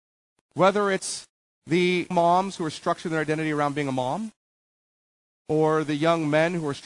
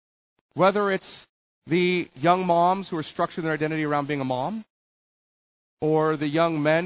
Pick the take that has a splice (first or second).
first